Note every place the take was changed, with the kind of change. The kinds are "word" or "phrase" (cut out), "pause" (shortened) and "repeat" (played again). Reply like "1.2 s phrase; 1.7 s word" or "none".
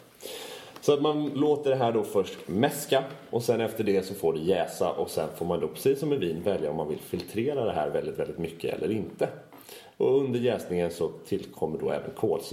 none